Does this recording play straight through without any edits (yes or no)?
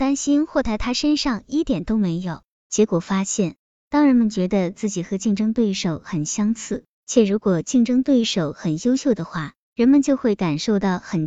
yes